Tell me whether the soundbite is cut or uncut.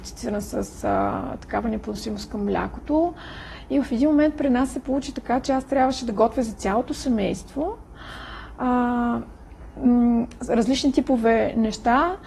uncut